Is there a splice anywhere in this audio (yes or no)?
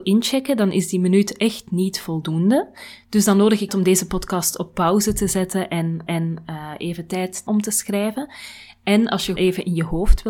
yes